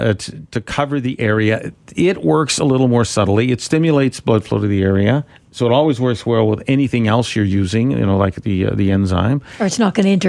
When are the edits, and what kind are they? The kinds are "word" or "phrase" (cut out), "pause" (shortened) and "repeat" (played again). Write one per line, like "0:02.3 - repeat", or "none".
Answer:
0:05.3 - pause

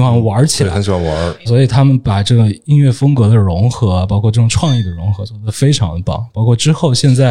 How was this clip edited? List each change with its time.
0:01.5 - word

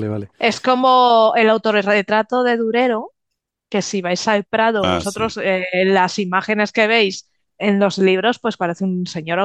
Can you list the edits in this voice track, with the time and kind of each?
none

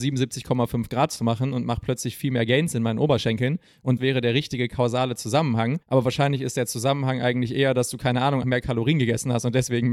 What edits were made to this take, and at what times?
0:04.0 - phrase
0:05.8 - pause
0:08.4 - word

